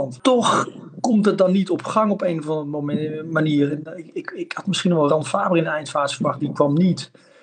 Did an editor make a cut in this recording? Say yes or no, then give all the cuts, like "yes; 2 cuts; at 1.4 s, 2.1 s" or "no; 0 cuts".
no; 0 cuts